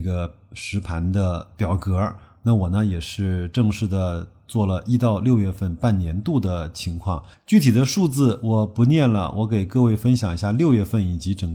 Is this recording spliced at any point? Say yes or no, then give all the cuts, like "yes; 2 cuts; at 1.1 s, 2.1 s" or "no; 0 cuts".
no; 0 cuts